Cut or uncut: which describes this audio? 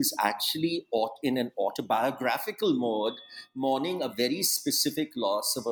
uncut